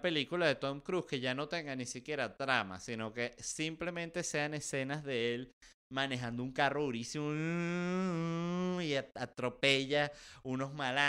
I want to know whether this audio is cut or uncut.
uncut